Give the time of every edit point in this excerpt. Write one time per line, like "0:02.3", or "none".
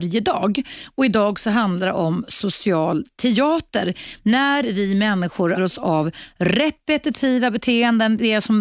0:05.6